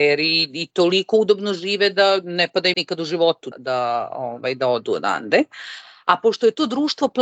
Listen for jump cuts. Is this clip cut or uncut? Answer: cut